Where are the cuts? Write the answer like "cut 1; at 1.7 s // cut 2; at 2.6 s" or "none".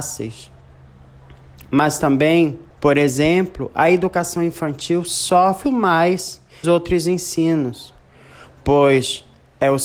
cut 1; at 2.7 s // cut 2; at 5.6 s // cut 3; at 6.6 s